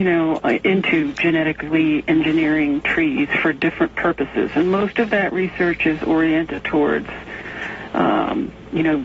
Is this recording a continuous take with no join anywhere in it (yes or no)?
yes